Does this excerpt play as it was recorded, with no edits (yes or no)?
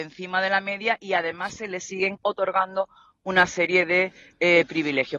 yes